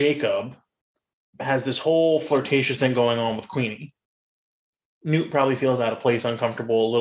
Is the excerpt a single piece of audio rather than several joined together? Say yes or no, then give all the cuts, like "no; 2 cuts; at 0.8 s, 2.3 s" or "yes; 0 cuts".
yes; 0 cuts